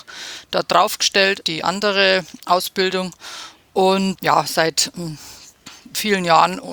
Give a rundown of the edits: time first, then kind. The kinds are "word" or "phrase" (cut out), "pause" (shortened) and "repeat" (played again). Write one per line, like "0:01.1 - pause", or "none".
0:01.4 - word